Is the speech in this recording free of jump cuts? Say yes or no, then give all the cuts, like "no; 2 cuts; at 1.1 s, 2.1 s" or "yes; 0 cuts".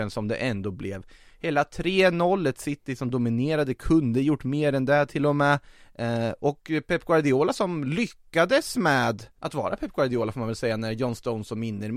no; 1 cut; at 9.4 s